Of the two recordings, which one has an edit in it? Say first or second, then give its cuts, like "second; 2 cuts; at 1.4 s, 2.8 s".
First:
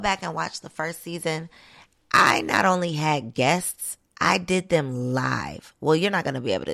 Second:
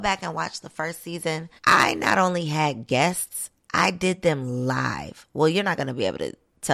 second; 1 cut; at 1.6 s